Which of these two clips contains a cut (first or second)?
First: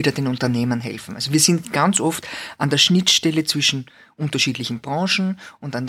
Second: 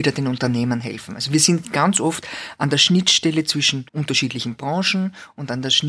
second